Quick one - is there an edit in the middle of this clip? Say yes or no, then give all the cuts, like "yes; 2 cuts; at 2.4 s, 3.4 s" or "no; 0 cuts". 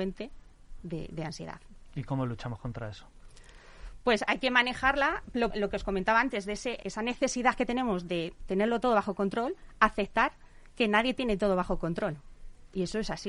yes; 2 cuts; at 5.5 s, 6.8 s